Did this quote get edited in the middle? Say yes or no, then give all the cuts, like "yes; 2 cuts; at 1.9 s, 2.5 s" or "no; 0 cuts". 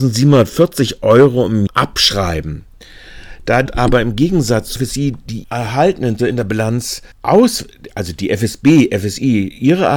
yes; 6 cuts; at 1.7 s, 3.7 s, 4.8 s, 5.4 s, 6.2 s, 7.1 s